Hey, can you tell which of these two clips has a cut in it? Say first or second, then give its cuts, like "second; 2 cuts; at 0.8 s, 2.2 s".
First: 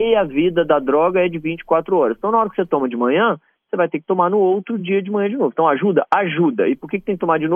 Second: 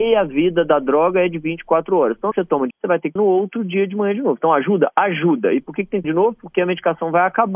second; 4 cuts; at 2.3 s, 2.7 s, 3.2 s, 6.0 s